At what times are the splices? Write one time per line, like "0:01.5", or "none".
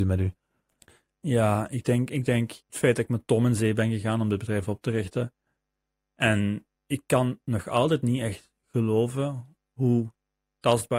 0:02.6
0:06.7

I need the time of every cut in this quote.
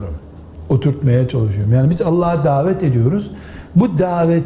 none

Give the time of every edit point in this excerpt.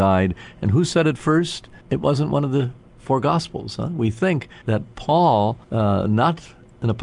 0:01.8
0:04.6
0:05.6

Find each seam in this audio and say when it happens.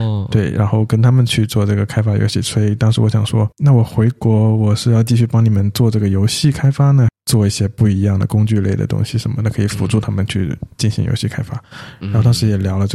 0:03.5
0:07.1

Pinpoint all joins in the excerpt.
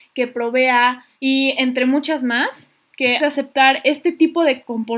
0:01.1
0:03.2

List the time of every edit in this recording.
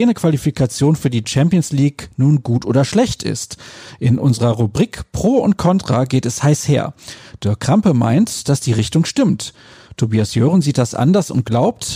none

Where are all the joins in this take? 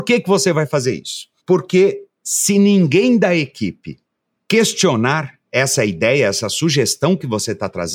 0:05.4

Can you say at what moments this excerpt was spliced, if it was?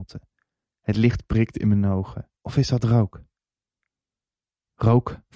0:02.4

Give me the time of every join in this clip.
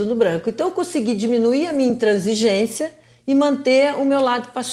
none

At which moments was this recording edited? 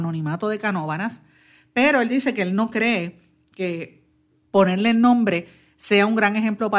none

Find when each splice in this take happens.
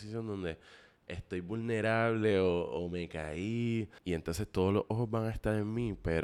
0:04.0

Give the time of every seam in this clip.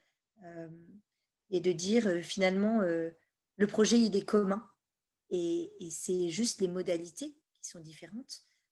none

